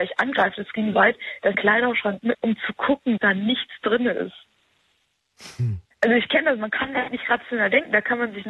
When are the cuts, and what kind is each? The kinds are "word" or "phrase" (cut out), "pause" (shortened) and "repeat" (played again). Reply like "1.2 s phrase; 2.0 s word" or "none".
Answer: 0.9 s word; 1.5 s phrase; 2.3 s phrase; 3.2 s word; 5.9 s pause; 7.1 s word